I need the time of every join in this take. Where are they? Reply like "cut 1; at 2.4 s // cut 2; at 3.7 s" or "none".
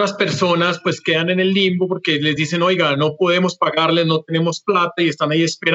none